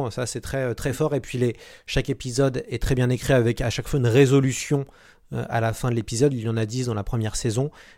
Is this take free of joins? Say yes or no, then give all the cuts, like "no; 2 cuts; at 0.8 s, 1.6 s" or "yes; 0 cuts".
yes; 0 cuts